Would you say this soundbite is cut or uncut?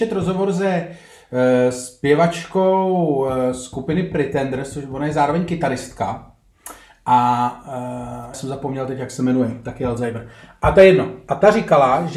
cut